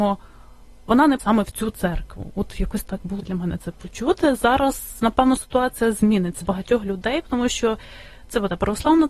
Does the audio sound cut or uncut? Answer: cut